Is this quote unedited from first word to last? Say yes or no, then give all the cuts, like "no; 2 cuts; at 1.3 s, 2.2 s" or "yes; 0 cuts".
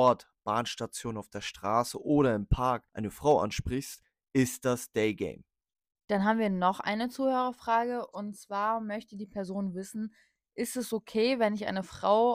yes; 0 cuts